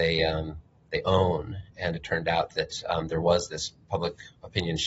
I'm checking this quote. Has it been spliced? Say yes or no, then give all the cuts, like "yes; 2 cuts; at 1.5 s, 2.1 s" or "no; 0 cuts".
no; 0 cuts